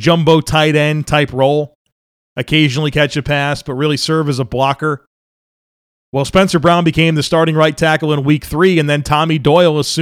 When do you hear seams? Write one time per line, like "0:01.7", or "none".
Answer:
none